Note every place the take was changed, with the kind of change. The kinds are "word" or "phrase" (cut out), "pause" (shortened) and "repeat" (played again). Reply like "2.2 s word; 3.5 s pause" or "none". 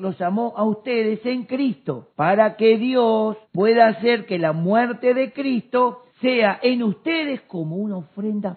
2.1 s pause; 3.4 s pause; 6.1 s pause